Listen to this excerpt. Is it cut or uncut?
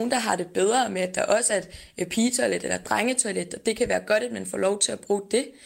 uncut